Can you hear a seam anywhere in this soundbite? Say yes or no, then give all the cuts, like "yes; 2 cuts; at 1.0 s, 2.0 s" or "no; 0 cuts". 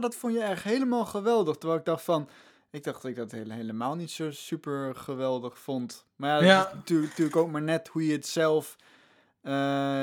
no; 0 cuts